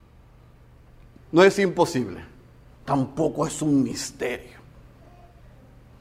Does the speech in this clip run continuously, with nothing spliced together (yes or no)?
no